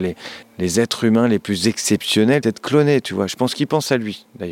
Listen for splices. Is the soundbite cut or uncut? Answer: cut